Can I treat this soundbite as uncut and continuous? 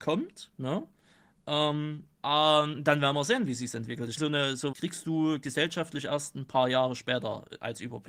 no; 3 cuts; at 2.1 s, 4.2 s, 4.7 s

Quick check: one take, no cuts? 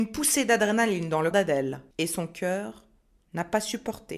no; 2 cuts; at 1.3 s, 1.9 s

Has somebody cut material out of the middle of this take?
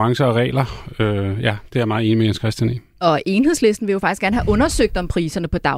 no; 0 cuts

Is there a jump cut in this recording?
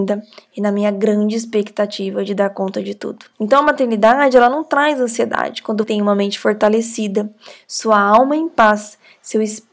yes; 2 cuts; at 3.3 s, 5.8 s

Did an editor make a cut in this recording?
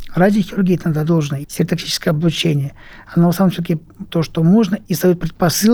yes; 3 cuts; at 1.1 s, 1.4 s, 4.1 s

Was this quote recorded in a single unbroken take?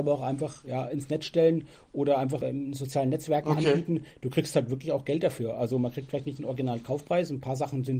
yes; 0 cuts

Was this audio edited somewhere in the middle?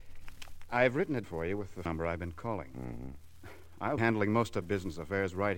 yes; 4 cuts; at 1.2 s, 1.9 s, 4.0 s, 4.6 s

